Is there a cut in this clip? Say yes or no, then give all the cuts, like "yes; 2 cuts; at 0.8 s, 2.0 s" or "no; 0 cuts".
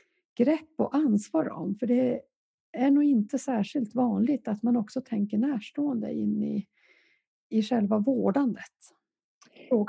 no; 0 cuts